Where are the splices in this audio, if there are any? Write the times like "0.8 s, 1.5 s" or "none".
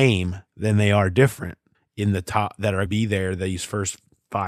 1.7 s, 2.9 s

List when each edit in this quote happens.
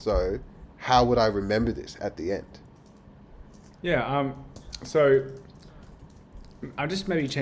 none

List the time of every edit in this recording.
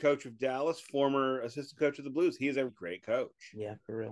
2.7 s

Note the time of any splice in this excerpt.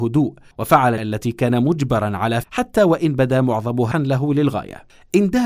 1.0 s, 2.4 s, 3.9 s

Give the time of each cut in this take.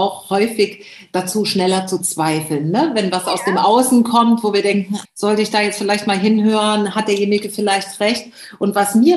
5.0 s

